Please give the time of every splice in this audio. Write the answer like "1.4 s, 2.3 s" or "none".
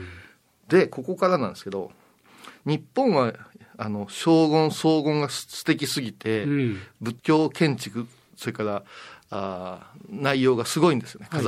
7.2 s